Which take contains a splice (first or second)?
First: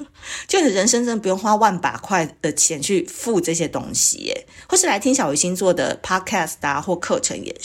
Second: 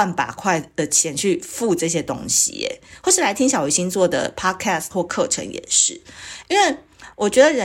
second